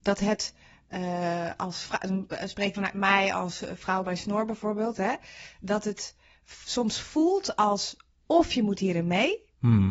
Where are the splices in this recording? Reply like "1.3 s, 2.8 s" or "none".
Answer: 2.7 s

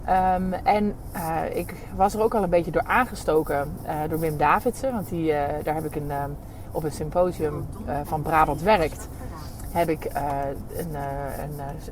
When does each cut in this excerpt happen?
none

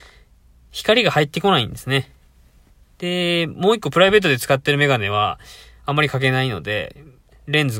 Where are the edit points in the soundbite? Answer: none

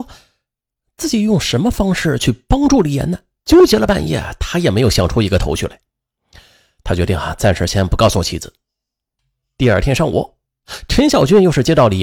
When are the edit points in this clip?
3.4 s

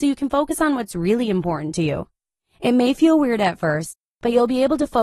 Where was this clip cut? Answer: none

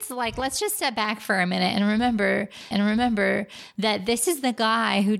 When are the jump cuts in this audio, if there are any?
2.7 s

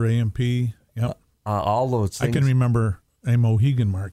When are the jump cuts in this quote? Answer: none

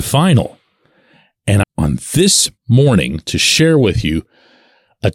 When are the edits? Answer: 1.6 s, 2.6 s

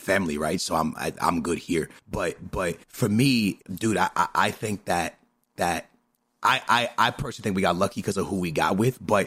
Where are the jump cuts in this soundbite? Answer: 2.0 s, 2.8 s, 3.6 s, 5.6 s

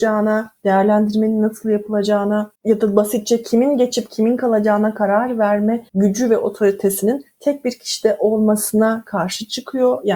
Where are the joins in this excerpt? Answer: 2.5 s, 5.9 s

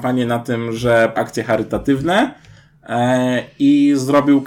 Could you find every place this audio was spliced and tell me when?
1.2 s

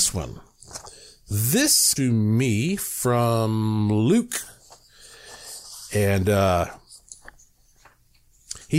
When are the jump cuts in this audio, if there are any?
2.0 s

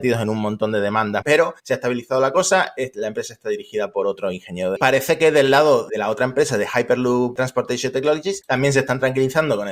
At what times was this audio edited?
1.2 s, 1.6 s, 4.8 s, 5.9 s

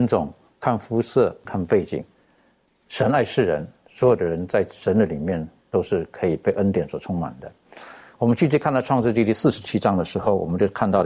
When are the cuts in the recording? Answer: 1.4 s

